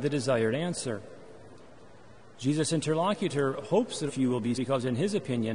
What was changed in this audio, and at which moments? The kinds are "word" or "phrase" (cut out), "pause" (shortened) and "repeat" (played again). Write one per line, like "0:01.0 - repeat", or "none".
0:04.1 - phrase
0:04.5 - word